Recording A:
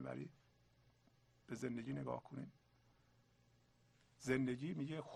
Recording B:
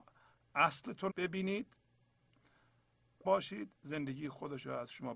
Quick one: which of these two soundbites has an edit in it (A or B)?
B